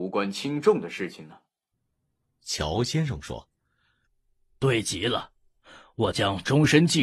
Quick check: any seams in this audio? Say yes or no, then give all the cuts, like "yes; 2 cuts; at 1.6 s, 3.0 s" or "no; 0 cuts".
no; 0 cuts